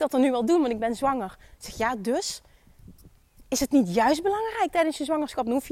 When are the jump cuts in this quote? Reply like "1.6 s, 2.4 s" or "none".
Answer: none